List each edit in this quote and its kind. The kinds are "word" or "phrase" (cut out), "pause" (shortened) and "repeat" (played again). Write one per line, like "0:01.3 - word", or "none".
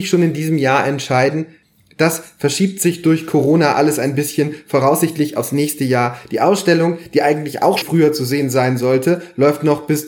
0:07.8 - word